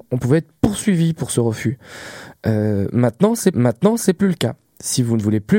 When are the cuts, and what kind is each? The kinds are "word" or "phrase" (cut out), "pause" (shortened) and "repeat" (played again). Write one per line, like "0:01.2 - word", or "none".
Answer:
0:03.5 - repeat